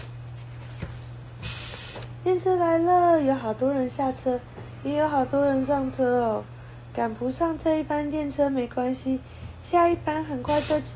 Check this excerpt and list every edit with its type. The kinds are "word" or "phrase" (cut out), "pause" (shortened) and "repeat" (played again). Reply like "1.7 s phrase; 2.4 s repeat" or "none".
none